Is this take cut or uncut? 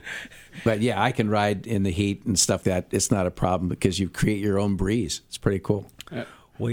cut